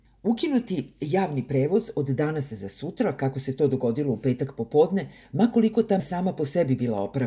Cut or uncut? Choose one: cut